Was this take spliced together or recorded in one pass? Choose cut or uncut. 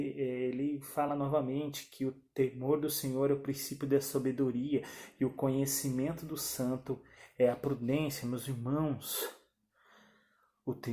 uncut